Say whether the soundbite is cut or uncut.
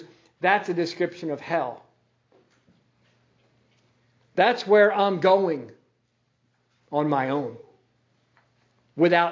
uncut